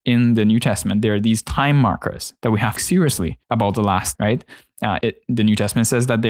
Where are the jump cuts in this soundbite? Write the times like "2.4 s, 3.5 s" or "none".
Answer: 2.4 s, 2.8 s, 3.4 s, 4.1 s, 5.0 s